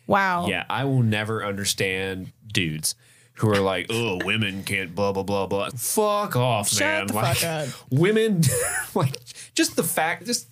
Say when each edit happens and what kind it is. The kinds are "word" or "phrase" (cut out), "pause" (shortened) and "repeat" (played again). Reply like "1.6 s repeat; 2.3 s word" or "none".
2.3 s word; 5.7 s word